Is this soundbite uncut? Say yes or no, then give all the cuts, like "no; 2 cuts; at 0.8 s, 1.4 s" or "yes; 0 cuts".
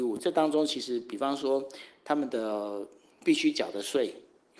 yes; 0 cuts